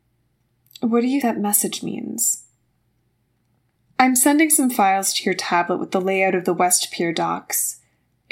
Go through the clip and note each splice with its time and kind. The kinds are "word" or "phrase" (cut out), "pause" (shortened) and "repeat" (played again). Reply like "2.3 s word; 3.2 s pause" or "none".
1.2 s word

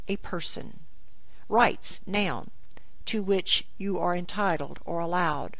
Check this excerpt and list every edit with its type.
3.0 s word

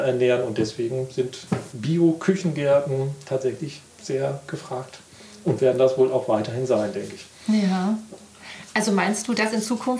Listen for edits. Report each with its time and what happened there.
none

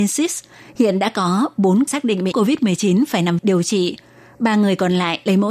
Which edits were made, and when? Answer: 1.9 s word; 2.3 s word; 3.4 s word

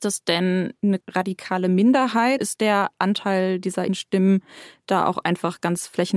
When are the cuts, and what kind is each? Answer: 1.0 s word; 2.4 s word; 3.9 s word

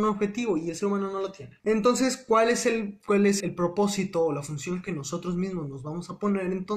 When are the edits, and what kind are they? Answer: 1.6 s pause; 3.4 s word

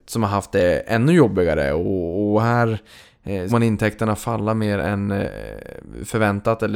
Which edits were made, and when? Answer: 3.5 s word

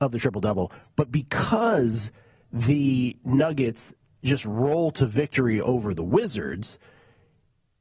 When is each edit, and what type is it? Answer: none

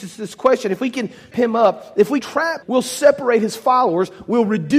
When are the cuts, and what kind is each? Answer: 1.3 s word; 2.2 s word; 2.6 s word

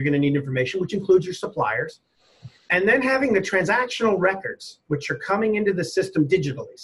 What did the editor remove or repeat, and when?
none

